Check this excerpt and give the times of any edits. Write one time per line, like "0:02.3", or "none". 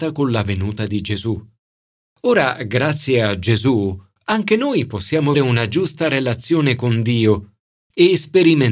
0:05.3